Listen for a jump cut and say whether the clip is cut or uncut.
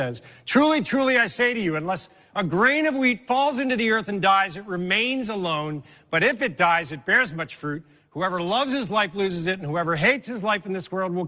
uncut